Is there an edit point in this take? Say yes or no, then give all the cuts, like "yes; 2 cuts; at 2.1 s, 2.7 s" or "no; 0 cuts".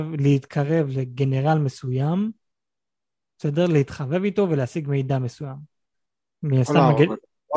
no; 0 cuts